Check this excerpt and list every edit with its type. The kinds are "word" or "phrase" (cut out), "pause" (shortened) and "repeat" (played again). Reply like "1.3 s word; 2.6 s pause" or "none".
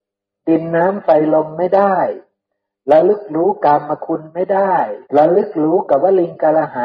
5.1 s pause